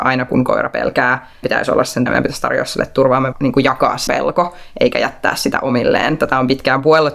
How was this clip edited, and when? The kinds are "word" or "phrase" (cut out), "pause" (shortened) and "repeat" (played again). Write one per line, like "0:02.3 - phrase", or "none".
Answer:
0:01.4 - word
0:02.1 - word
0:03.3 - word
0:04.1 - word